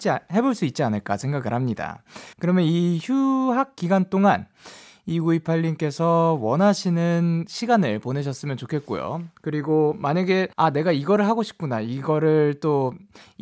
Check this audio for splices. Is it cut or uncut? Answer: cut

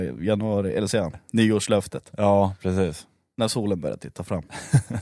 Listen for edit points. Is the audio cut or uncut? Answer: uncut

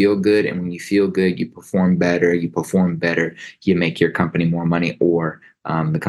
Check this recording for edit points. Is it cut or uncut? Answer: uncut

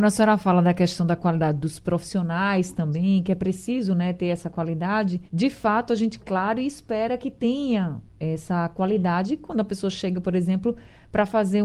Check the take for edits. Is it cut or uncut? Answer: cut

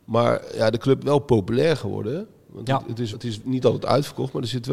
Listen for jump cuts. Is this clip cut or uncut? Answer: cut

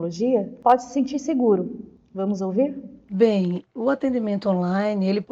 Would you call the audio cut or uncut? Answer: cut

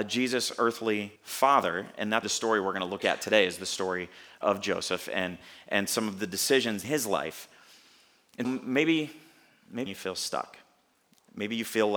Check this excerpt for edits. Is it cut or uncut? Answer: cut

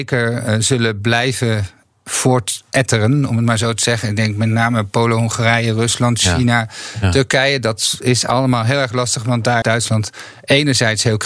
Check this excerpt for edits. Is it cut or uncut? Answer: cut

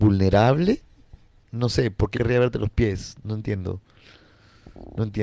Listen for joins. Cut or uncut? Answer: cut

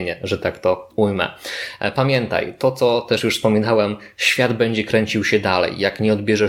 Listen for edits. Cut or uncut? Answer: uncut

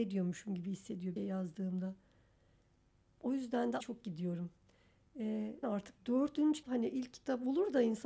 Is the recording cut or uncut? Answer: cut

